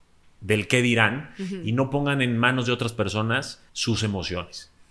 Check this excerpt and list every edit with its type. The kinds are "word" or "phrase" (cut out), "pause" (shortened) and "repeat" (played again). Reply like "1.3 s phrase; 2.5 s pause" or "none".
3.7 s pause